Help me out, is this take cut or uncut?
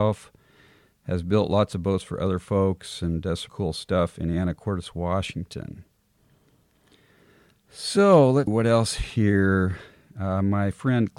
cut